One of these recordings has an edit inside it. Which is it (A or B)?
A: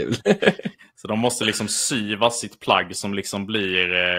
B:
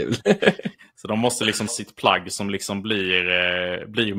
B